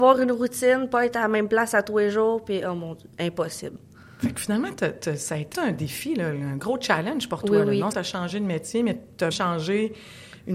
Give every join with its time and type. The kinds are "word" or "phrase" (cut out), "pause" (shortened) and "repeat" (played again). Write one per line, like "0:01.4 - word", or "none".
0:05.5 - word
0:07.9 - word
0:09.3 - word